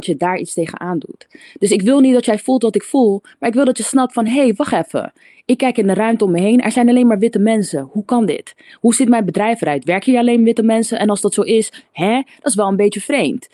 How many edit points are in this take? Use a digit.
0